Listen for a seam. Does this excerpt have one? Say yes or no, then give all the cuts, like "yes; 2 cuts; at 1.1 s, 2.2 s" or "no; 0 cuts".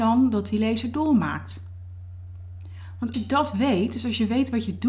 yes; 1 cut; at 3.1 s